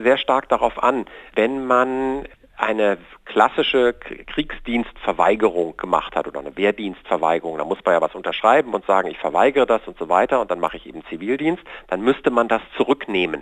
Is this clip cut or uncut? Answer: uncut